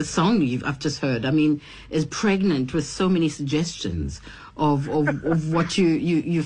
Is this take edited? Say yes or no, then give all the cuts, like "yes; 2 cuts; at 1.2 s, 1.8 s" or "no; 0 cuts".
no; 0 cuts